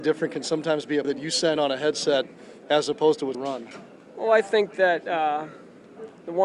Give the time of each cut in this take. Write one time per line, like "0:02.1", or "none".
0:01.0
0:01.6
0:03.3